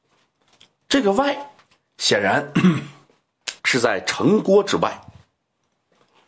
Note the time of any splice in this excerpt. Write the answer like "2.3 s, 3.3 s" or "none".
3.6 s